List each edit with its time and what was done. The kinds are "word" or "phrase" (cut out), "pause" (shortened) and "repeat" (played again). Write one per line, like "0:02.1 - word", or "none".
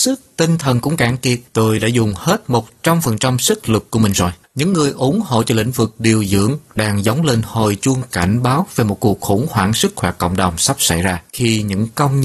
0:01.5 - pause
0:04.4 - pause
0:11.3 - pause